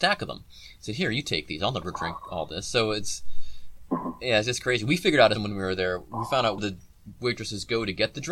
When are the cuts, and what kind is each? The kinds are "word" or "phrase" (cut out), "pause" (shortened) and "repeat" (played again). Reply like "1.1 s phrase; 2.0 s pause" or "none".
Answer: 5.3 s word; 6.6 s word